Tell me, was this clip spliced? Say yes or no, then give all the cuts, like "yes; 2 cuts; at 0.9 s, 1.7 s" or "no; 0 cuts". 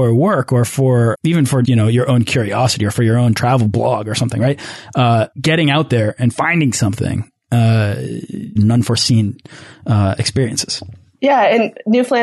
yes; 4 cuts; at 1.1 s, 1.6 s, 5.3 s, 8.6 s